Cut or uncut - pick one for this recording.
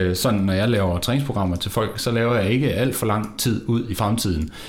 uncut